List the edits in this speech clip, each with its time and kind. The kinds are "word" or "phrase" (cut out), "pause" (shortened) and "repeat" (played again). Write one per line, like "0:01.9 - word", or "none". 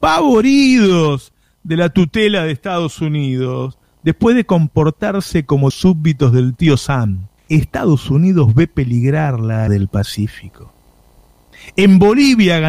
0:05.7 - word
0:07.4 - pause
0:09.7 - word